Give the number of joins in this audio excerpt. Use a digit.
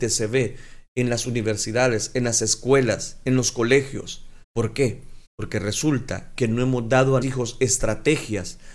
3